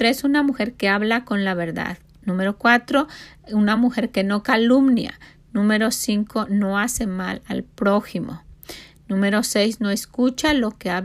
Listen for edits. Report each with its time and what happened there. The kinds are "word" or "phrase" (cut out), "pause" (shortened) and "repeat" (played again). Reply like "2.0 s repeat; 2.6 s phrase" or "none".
none